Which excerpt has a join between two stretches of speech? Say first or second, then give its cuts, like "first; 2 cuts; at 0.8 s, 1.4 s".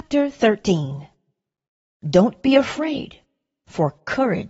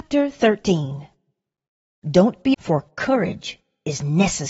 second; 1 cut; at 2.5 s